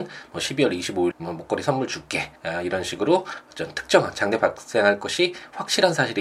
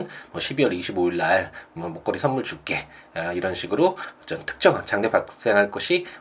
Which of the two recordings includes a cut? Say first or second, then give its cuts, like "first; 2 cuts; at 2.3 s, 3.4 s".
first; 2 cuts; at 1.1 s, 2.4 s